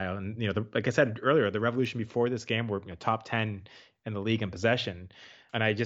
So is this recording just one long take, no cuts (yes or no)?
yes